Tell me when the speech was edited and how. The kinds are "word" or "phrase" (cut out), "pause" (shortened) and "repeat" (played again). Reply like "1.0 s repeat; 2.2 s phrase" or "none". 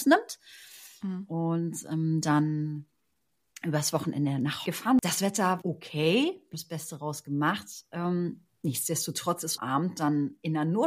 2.2 s word; 4.7 s word; 5.6 s word; 6.5 s word; 9.6 s word